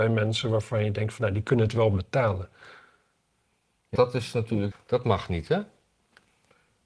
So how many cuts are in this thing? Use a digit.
2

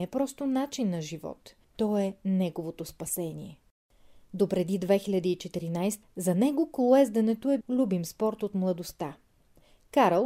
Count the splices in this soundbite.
3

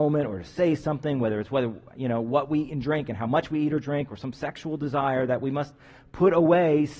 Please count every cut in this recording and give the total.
0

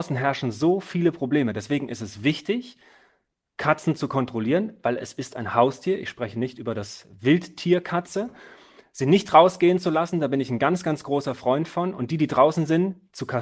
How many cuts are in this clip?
0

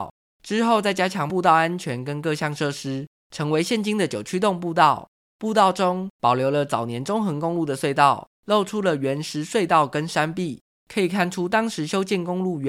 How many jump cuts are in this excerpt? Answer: 0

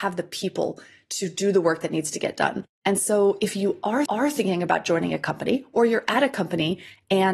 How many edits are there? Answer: 1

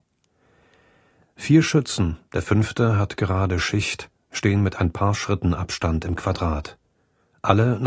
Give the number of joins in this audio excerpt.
1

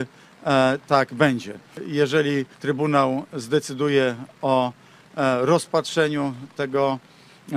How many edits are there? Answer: 1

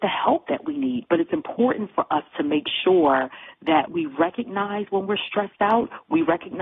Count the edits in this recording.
1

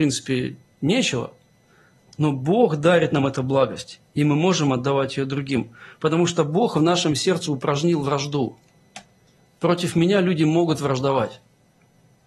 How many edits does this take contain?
0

